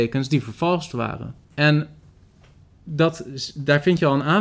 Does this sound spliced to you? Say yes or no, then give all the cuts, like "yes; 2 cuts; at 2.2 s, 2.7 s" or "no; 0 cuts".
yes; 1 cut; at 1.4 s